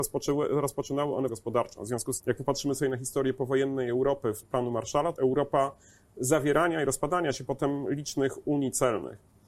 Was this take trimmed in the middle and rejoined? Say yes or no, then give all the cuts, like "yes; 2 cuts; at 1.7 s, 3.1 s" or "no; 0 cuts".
yes; 4 cuts; at 1.3 s, 2.2 s, 4.4 s, 5.2 s